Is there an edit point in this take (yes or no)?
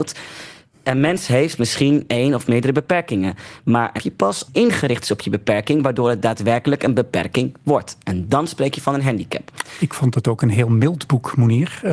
yes